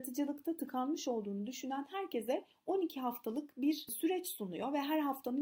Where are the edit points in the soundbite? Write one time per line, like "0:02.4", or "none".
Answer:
none